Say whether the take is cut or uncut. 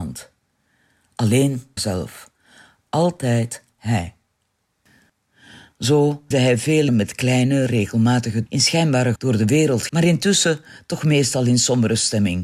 cut